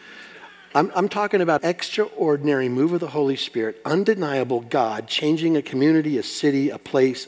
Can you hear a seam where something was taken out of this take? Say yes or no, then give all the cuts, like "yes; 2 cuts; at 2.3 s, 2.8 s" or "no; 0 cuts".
yes; 1 cut; at 1.6 s